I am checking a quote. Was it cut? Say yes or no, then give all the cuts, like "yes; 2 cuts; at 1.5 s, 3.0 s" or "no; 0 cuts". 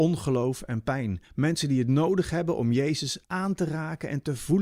yes; 2 cuts; at 1.2 s, 3.2 s